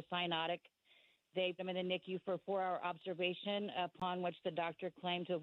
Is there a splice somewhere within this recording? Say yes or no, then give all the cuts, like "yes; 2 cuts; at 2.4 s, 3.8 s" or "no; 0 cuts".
yes; 1 cut; at 1.6 s